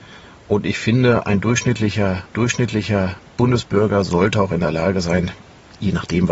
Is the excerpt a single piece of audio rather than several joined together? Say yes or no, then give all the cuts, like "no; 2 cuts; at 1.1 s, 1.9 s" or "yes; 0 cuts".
no; 1 cut; at 2.3 s